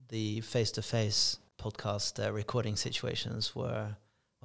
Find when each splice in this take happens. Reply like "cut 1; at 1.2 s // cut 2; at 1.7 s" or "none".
cut 1; at 1.5 s